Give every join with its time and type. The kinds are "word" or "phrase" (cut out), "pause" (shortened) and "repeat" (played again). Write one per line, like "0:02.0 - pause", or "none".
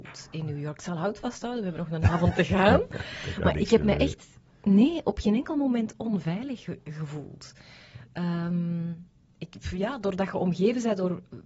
none